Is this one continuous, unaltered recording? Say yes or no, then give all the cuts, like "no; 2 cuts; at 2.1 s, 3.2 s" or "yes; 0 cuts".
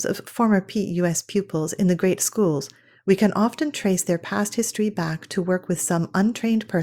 yes; 0 cuts